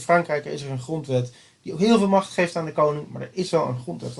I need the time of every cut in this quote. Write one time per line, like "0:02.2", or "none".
none